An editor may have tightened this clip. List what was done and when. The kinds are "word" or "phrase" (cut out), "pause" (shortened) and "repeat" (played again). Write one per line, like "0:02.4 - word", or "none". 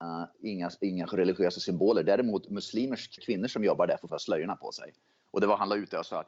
0:03.2 - word
0:04.1 - word